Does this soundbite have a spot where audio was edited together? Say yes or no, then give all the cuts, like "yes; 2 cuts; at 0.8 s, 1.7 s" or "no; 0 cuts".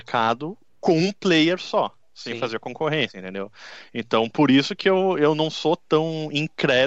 no; 0 cuts